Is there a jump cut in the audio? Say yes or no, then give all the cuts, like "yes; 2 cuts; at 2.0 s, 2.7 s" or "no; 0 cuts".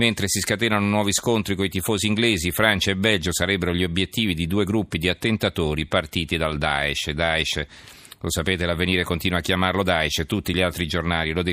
no; 0 cuts